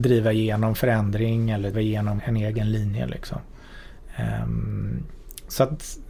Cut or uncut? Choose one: cut